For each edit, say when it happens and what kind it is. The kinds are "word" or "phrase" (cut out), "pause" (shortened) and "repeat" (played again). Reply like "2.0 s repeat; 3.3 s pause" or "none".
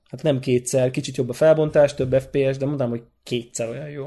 none